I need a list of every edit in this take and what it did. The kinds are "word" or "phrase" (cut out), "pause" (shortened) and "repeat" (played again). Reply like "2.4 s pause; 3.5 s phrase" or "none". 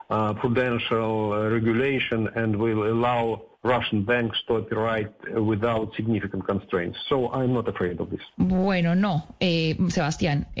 3.5 s pause; 8.3 s pause